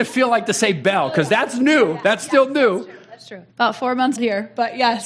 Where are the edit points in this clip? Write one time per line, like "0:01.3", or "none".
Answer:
0:03.5
0:04.2

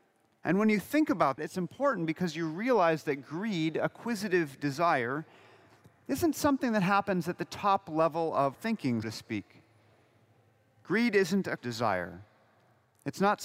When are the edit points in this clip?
0:01.4
0:08.5
0:09.0
0:11.6

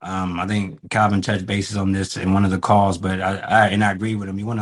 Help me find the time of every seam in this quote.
none

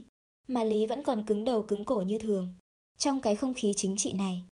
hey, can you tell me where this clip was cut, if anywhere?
none

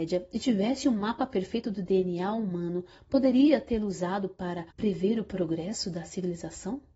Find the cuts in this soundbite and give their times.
0:04.7

